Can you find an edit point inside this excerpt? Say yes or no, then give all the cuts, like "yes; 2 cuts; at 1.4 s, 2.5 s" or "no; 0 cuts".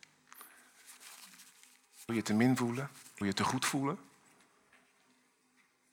yes; 2 cuts; at 2.1 s, 3.2 s